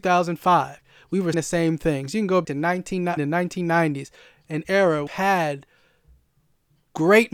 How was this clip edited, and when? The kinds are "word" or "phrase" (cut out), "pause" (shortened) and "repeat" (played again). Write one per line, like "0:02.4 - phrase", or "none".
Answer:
0:01.3 - word
0:02.4 - word
0:03.2 - word
0:04.6 - word
0:05.1 - word